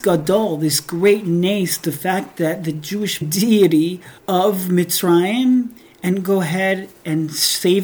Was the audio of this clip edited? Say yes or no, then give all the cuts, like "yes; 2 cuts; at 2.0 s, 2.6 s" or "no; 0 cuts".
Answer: yes; 2 cuts; at 3.2 s, 4.2 s